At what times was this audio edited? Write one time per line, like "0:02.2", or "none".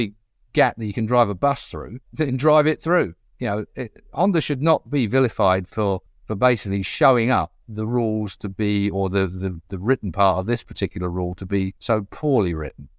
0:02.0
0:06.1
0:11.8